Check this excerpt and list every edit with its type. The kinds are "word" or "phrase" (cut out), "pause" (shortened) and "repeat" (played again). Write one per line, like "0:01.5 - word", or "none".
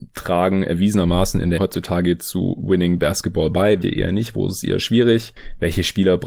0:01.6 - word
0:03.8 - word